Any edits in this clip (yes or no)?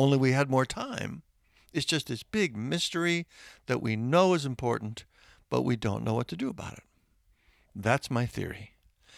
no